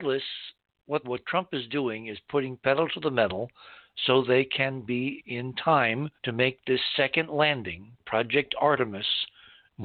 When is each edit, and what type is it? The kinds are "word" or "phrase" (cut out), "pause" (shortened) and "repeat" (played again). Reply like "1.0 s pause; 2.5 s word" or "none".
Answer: 1.0 s phrase; 5.2 s word; 6.1 s pause